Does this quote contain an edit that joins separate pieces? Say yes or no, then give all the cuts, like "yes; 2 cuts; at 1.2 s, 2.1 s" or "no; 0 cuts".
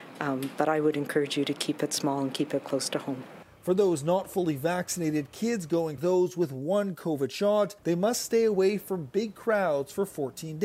yes; 2 cuts; at 6.0 s, 7.8 s